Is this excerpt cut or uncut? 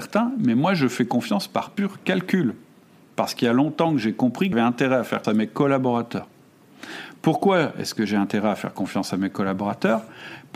cut